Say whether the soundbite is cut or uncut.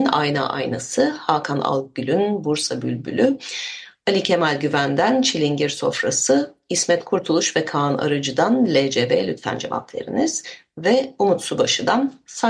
uncut